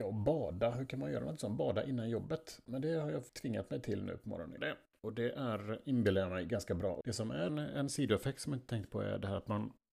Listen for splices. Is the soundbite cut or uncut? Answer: cut